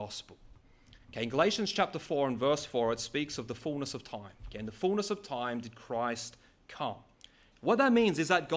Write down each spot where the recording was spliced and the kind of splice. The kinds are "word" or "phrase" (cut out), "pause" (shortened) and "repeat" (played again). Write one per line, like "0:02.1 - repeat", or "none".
none